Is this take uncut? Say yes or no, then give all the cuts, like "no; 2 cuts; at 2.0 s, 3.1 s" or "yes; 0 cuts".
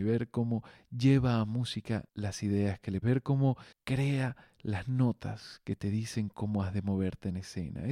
no; 3 cuts; at 2.1 s, 3.0 s, 3.7 s